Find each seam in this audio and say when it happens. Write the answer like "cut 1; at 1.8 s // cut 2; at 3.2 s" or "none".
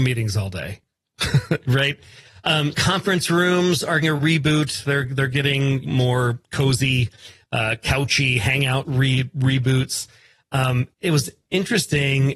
cut 1; at 2.7 s // cut 2; at 4.0 s // cut 3; at 5.8 s // cut 4; at 8.8 s // cut 5; at 10.9 s